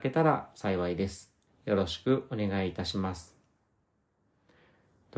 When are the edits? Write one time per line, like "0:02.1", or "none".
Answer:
0:01.5